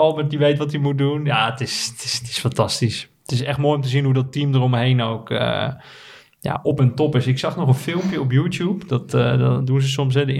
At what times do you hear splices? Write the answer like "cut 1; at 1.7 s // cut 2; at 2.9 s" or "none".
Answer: none